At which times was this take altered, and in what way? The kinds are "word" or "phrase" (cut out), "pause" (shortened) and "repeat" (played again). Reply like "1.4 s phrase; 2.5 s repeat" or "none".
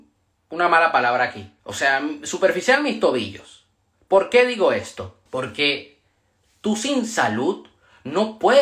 1.6 s pause; 3.9 s pause; 5.3 s pause